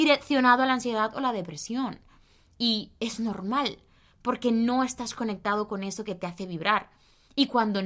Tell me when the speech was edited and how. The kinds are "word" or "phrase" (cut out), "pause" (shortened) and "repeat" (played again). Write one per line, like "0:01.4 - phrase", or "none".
none